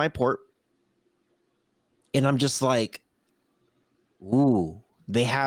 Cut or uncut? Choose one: uncut